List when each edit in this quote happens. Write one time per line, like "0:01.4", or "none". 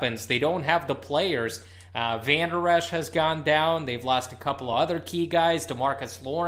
none